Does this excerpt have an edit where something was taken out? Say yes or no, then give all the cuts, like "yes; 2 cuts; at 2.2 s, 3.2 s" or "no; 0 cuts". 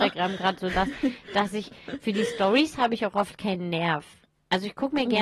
no; 0 cuts